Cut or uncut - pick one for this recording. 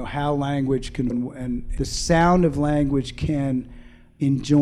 cut